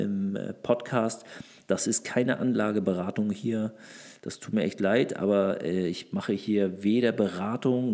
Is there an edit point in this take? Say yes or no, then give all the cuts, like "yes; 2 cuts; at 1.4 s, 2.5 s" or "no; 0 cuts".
no; 0 cuts